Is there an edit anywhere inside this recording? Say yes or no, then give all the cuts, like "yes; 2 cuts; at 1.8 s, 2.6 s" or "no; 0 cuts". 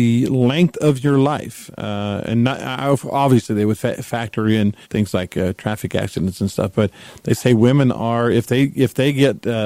yes; 1 cut; at 4.8 s